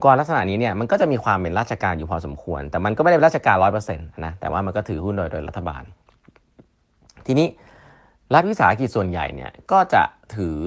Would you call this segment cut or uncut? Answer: uncut